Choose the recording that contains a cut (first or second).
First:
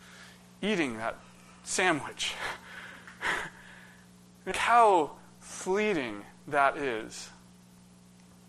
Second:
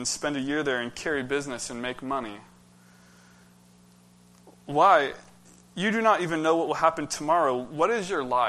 first